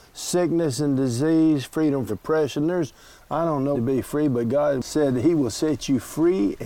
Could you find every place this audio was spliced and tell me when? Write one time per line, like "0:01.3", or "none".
0:02.1
0:03.7